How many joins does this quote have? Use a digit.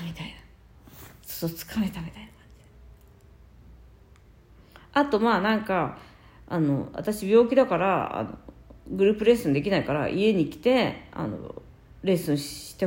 0